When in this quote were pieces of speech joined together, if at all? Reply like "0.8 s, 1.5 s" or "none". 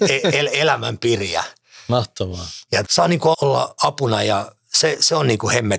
2.8 s, 3.3 s